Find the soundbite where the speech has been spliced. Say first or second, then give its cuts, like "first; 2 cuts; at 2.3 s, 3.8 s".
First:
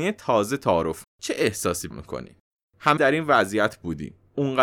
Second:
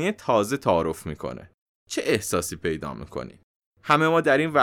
first; 3 cuts; at 1.0 s, 1.9 s, 3.0 s